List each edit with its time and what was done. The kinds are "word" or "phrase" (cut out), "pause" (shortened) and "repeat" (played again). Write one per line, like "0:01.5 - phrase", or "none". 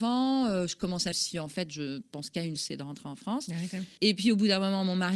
0:01.1 - phrase
0:02.6 - word
0:04.0 - pause